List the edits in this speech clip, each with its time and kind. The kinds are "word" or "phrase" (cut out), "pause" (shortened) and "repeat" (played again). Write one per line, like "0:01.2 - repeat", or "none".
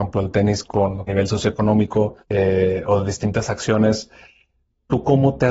0:01.1 - phrase
0:02.2 - pause